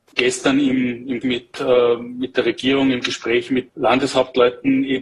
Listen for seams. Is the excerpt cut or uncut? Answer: cut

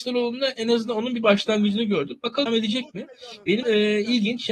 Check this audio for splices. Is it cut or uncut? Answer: cut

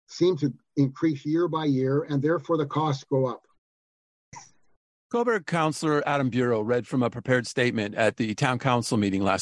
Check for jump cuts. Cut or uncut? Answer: uncut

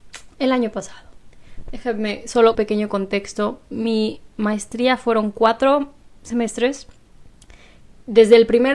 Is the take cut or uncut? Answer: cut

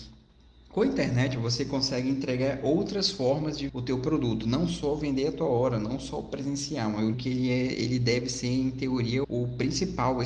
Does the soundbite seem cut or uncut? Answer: cut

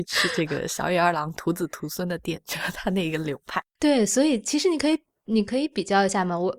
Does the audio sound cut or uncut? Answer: uncut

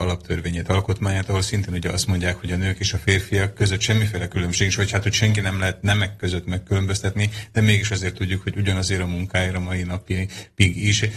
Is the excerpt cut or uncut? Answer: uncut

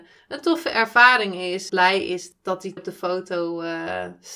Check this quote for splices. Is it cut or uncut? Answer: cut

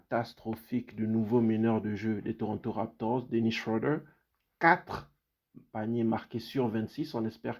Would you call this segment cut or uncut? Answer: uncut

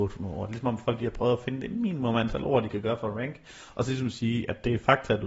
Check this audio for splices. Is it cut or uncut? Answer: uncut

